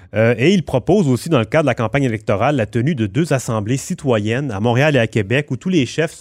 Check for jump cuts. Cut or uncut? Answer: uncut